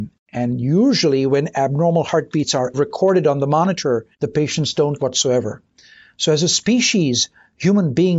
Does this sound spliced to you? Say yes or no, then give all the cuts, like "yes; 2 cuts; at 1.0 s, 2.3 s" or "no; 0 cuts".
yes; 3 cuts; at 2.7 s, 4.1 s, 5.0 s